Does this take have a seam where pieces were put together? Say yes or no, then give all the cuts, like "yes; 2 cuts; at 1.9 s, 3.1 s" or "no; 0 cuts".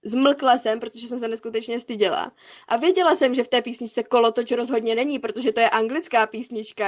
no; 0 cuts